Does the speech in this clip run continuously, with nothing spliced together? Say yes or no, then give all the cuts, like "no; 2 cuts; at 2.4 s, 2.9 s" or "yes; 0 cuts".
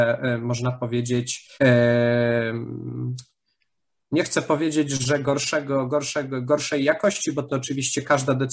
no; 1 cut; at 1.5 s